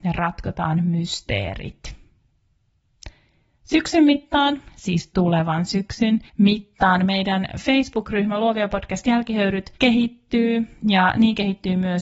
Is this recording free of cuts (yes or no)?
no